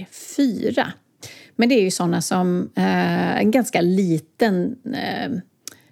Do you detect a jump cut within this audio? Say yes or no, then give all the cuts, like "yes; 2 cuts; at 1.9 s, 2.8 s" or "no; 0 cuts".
no; 0 cuts